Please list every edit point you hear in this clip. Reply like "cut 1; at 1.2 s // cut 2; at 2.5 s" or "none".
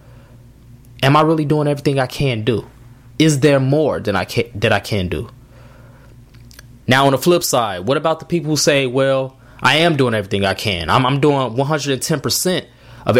none